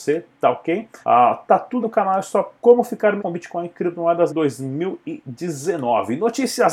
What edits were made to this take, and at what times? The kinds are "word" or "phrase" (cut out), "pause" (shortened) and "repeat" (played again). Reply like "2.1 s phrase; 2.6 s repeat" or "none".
1.0 s pause; 1.8 s word; 2.6 s word; 3.2 s word; 4.3 s word